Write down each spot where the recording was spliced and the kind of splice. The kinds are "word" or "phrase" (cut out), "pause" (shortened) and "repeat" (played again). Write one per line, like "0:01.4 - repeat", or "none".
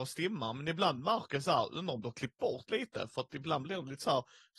none